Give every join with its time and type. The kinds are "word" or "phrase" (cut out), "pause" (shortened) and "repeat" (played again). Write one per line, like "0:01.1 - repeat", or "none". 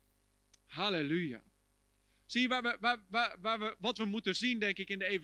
none